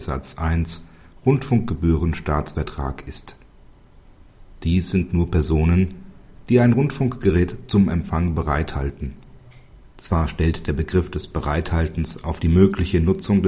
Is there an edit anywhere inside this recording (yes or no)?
no